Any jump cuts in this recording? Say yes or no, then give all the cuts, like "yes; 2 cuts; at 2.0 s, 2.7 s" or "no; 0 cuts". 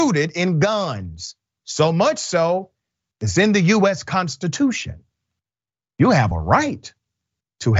no; 0 cuts